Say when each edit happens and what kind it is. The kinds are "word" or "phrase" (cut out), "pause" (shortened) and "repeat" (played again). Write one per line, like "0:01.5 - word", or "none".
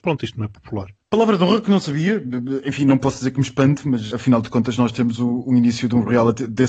0:04.1 - word